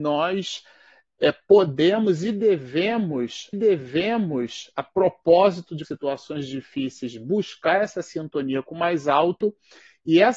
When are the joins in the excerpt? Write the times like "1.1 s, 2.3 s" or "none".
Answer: 3.5 s, 5.8 s